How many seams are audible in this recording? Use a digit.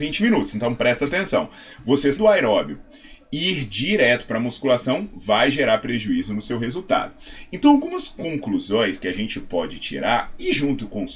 1